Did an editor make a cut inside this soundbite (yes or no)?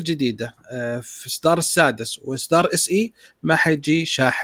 no